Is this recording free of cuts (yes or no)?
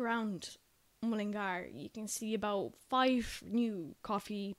yes